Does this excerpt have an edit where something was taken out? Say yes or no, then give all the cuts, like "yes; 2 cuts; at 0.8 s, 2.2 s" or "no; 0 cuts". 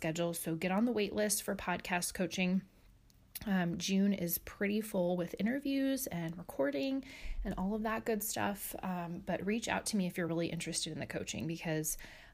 no; 0 cuts